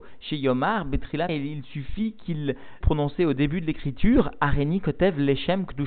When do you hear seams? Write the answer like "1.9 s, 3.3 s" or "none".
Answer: 1.3 s, 2.8 s